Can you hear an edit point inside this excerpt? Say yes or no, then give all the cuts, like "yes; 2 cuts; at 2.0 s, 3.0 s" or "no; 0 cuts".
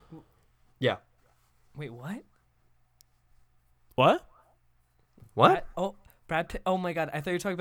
no; 0 cuts